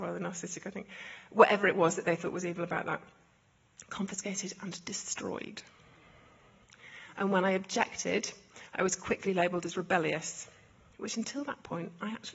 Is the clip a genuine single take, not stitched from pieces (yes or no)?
yes